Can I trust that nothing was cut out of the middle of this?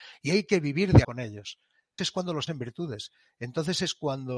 no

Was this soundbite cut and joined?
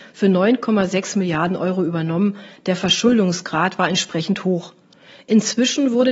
no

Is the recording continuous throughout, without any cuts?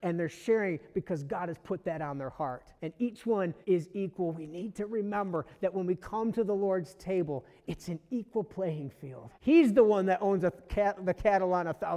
no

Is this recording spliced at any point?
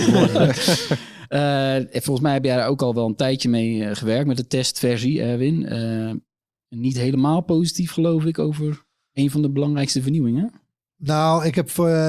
no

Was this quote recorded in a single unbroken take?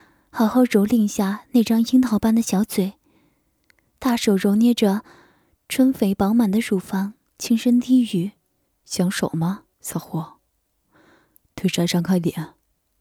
no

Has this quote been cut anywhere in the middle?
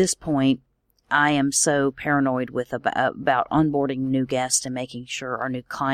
no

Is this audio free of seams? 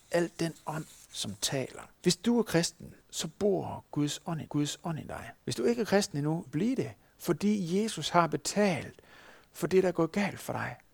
no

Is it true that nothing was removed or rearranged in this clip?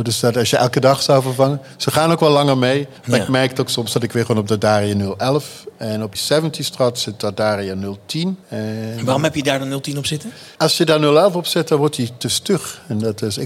no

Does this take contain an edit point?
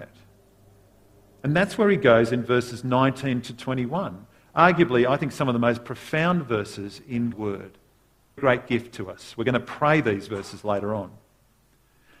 yes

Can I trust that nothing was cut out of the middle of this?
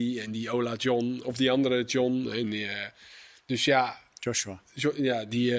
yes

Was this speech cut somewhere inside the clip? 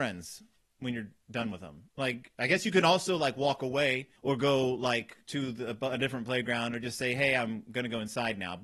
yes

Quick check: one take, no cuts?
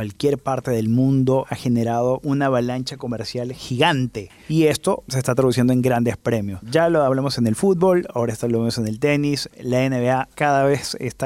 yes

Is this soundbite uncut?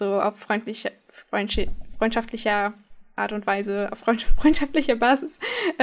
yes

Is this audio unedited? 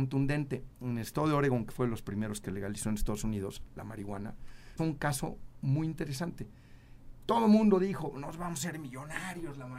no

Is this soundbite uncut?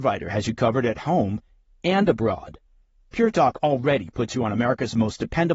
yes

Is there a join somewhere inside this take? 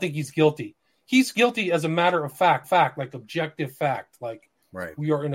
yes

